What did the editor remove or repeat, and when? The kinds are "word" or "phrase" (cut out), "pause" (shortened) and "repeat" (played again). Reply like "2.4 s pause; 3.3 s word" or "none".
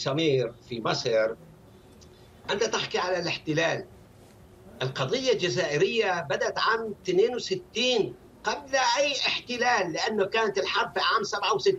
none